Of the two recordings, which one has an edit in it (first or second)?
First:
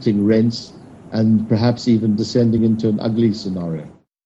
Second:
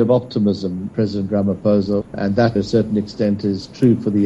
second